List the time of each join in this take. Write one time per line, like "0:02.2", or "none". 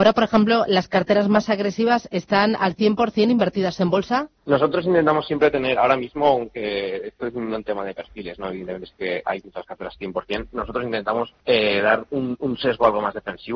0:11.4